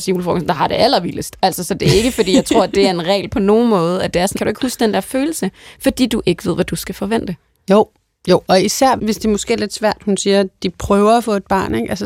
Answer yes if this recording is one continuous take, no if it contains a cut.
no